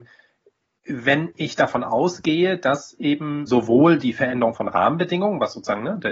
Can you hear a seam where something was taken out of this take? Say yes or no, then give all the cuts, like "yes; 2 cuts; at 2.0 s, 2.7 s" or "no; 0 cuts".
yes; 1 cut; at 3.5 s